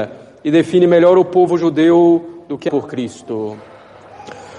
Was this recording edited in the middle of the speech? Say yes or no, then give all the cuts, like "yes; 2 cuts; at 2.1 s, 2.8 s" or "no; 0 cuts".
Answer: yes; 1 cut; at 2.7 s